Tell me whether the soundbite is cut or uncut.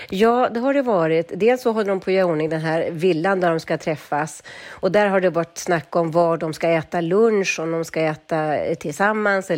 uncut